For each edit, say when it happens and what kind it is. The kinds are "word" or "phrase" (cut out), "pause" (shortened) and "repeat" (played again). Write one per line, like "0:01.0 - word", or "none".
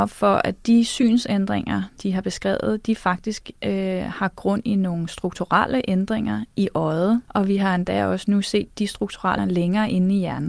0:02.0 - word
0:07.2 - pause
0:09.4 - word